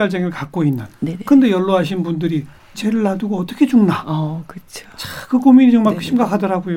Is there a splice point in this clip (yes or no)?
yes